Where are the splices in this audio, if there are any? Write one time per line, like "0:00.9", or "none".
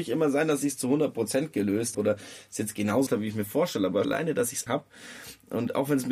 0:01.9
0:03.1
0:04.0
0:04.7